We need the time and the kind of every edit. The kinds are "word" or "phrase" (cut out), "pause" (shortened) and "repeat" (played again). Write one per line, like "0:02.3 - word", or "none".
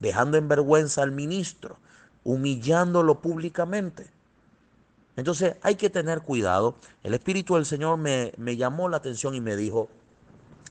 none